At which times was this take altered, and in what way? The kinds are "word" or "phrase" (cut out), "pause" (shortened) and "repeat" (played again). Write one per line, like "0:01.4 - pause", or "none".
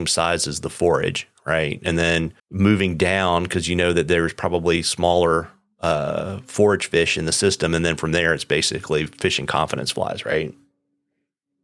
0:02.4 - pause